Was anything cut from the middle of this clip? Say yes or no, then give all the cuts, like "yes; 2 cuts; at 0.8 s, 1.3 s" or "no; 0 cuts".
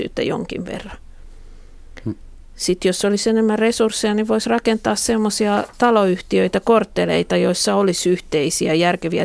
no; 0 cuts